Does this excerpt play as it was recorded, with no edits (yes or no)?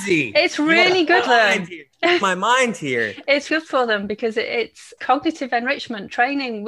no